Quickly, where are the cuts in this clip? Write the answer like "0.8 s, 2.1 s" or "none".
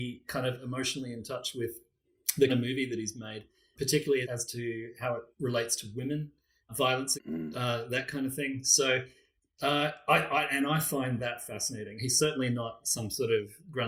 2.5 s, 3.8 s, 4.2 s, 5.3 s, 6.7 s, 7.1 s